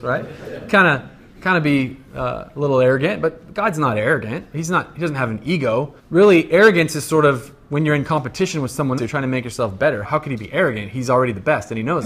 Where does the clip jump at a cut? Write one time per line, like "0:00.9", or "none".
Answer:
0:06.0
0:09.0
0:10.0